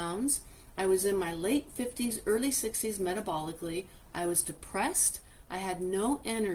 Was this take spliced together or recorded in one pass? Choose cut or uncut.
uncut